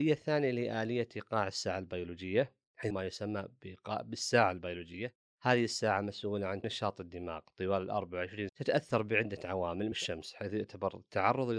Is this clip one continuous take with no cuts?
no; 4 cuts; at 2.9 s, 6.6 s, 8.5 s, 9.9 s

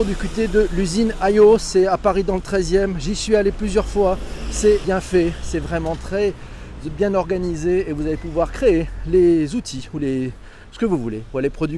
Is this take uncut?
no; 1 cut; at 4.8 s

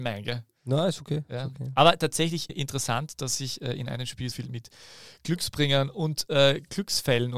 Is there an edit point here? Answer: yes; 2 cuts; at 2.5 s, 4.3 s

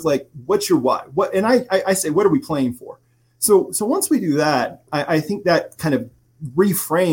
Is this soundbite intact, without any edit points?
yes; 0 cuts

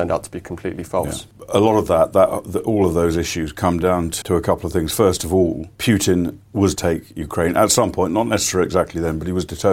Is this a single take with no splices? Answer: no; 4 cuts; at 1.3 s, 4.2 s, 5.7 s, 6.8 s

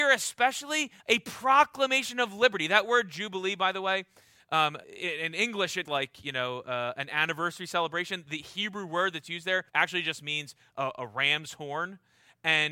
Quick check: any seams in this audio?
yes; 4 cuts; at 1.0 s, 4.8 s, 5.9 s, 9.7 s

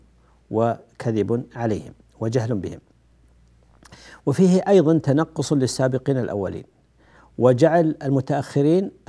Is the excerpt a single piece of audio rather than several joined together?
yes; 0 cuts

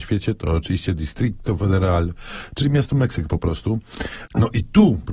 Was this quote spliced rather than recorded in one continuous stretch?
no; 0 cuts

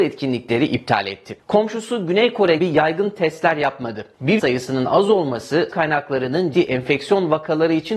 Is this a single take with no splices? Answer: no; 4 cuts; at 2.6 s, 4.4 s, 5.7 s, 6.5 s

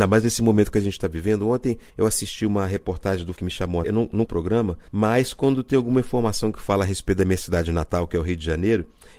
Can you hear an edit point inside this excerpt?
yes; 5 cuts; at 1.9 s, 3.4 s, 3.8 s, 4.2 s, 4.9 s

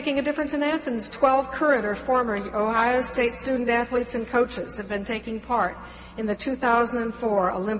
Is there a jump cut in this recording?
yes; 1 cut; at 1.1 s

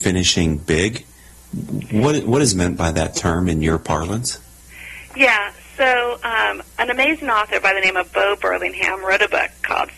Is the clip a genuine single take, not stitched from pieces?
yes; 0 cuts

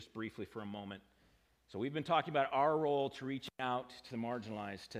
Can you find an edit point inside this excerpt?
no; 0 cuts

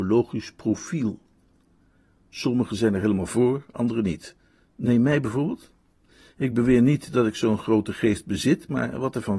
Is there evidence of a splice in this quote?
no; 0 cuts

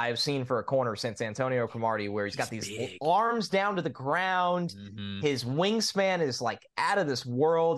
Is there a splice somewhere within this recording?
no; 0 cuts

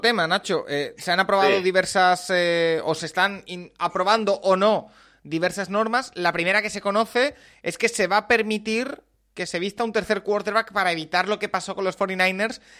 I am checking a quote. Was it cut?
no; 0 cuts

